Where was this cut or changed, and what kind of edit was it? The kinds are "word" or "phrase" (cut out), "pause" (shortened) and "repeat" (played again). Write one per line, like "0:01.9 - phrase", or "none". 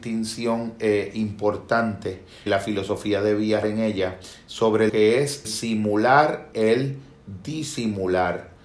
0:02.5 - word
0:03.6 - word
0:04.9 - word
0:05.4 - word
0:06.5 - word

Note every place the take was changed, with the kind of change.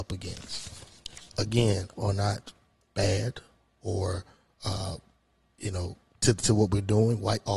0:02.0 - phrase
0:02.8 - word

